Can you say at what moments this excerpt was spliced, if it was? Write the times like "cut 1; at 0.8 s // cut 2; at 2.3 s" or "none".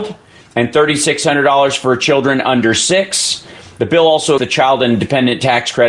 cut 1; at 4.4 s